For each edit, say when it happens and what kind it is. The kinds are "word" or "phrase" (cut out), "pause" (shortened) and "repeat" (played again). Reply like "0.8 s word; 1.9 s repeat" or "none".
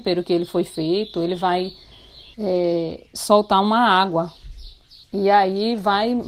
2.3 s pause; 5.0 s pause